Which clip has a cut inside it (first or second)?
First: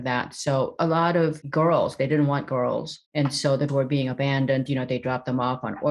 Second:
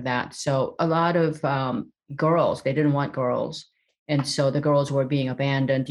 first